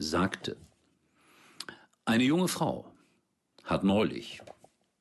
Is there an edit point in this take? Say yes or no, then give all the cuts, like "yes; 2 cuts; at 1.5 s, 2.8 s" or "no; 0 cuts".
no; 0 cuts